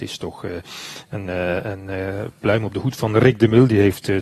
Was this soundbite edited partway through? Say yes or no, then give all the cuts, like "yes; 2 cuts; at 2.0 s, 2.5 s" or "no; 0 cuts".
no; 0 cuts